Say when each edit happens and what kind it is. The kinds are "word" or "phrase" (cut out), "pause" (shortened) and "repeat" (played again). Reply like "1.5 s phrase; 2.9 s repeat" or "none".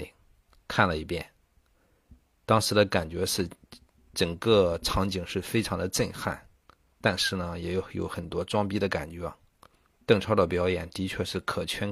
none